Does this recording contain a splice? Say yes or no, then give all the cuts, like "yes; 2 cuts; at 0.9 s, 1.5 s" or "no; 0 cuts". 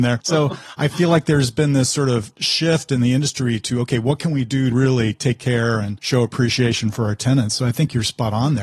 yes; 1 cut; at 4.7 s